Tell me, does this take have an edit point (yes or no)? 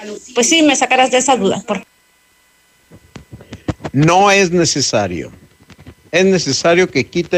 no